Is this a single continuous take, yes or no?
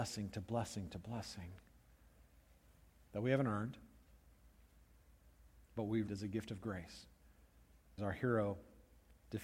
no